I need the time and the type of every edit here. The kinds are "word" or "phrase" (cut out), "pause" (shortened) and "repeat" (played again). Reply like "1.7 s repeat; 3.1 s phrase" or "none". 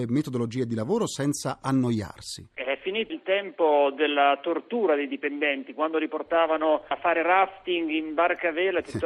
3.1 s word